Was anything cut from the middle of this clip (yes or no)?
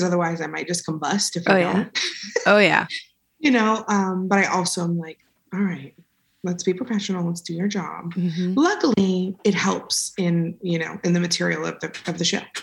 no